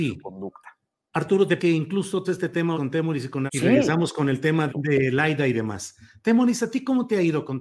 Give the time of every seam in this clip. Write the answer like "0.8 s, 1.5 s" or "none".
1.6 s, 2.2 s, 2.7 s, 3.5 s, 4.7 s